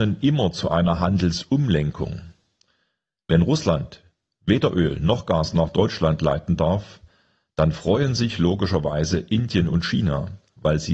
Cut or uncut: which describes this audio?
uncut